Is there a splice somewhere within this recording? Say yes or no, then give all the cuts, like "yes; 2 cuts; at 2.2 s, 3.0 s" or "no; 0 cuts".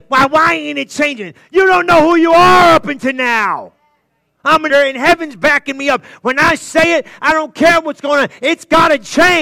yes; 1 cut; at 4.7 s